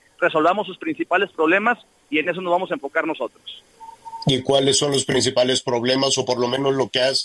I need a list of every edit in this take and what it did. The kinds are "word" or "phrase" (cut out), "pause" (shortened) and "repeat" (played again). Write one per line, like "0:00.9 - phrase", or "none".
none

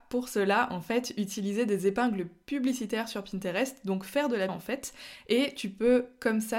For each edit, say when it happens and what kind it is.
0:04.5 - word

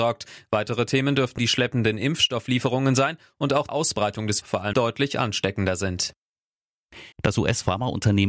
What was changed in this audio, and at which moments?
0:01.4 - word
0:03.7 - phrase
0:04.4 - word
0:04.7 - phrase
0:07.1 - pause

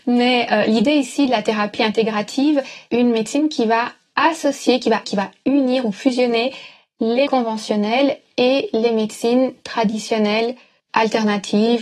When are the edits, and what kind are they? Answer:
0:02.9 - phrase
0:05.0 - word
0:07.3 - word

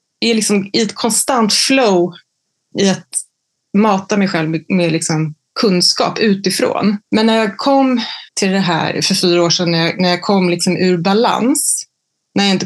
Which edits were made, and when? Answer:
0:02.7 - word
0:07.0 - pause
0:08.3 - pause

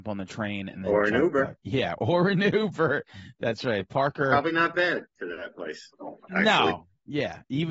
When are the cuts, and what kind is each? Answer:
0:01.6 - pause
0:05.1 - pause

